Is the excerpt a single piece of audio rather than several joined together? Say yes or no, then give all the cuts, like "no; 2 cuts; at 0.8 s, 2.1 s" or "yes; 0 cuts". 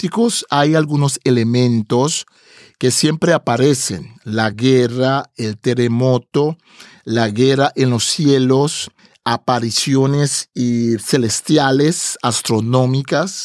yes; 0 cuts